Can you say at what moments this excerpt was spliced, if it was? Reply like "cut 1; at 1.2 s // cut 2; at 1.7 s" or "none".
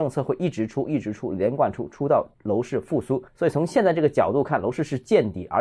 cut 1; at 2.3 s // cut 2; at 3.3 s